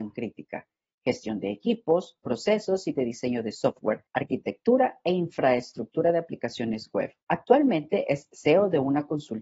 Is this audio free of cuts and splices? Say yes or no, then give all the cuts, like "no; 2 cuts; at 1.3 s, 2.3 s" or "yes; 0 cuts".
no; 3 cuts; at 2.9 s, 4.1 s, 7.2 s